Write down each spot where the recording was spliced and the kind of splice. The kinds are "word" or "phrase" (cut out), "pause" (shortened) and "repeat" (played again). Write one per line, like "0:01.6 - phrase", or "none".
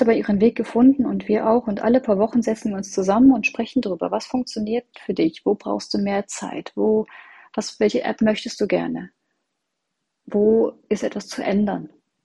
0:04.9 - word